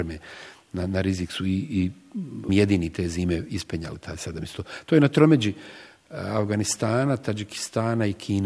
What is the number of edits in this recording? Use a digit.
1